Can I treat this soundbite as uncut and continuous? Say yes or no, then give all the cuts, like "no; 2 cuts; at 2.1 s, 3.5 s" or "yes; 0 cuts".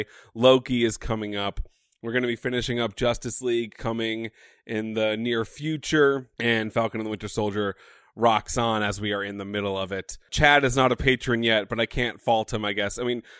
yes; 0 cuts